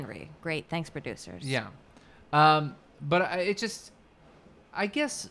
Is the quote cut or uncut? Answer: uncut